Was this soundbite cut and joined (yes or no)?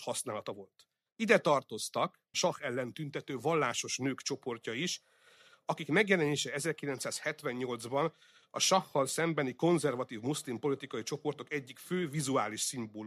yes